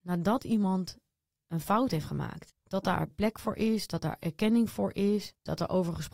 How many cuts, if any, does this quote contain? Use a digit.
0